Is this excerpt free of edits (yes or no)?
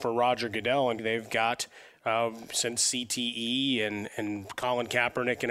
no